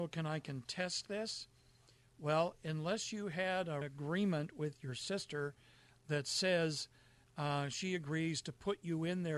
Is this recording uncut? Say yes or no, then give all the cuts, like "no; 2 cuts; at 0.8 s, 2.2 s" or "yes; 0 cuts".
no; 1 cut; at 3.8 s